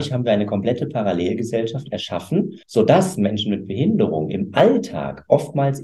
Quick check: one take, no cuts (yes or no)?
no